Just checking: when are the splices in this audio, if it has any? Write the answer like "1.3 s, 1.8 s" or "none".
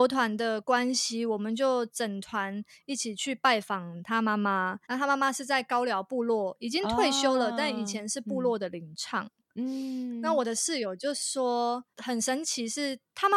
4.8 s, 11.9 s